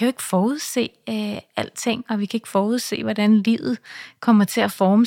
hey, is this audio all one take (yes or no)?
yes